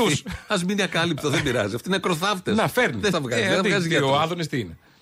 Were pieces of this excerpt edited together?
yes; 1 cut; at 3.1 s

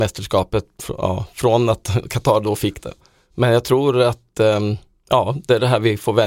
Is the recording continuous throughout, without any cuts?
yes; 0 cuts

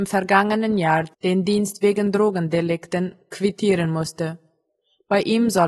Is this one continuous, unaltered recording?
yes; 0 cuts

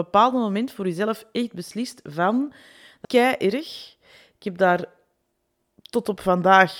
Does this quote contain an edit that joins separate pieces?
yes; 1 cut; at 3.0 s

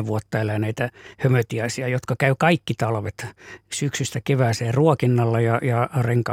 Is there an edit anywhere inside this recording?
no; 0 cuts

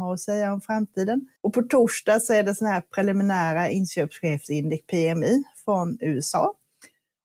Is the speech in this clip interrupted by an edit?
yes; 1 cut; at 1.4 s

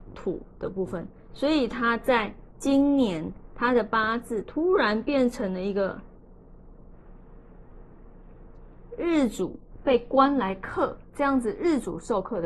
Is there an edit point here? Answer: yes; 1 cut; at 11.1 s

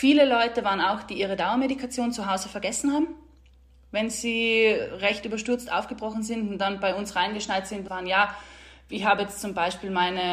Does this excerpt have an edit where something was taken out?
yes; 1 cut; at 7.9 s

